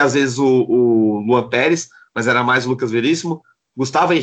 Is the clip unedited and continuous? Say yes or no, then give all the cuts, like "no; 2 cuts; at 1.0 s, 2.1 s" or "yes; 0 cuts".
yes; 0 cuts